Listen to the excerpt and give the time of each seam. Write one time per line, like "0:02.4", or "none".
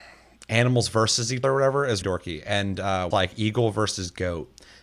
0:01.4
0:02.0
0:03.1